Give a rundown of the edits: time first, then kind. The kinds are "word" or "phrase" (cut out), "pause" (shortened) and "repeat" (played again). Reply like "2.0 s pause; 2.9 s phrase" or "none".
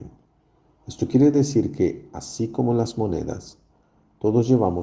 none